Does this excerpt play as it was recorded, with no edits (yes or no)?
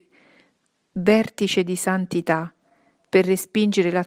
yes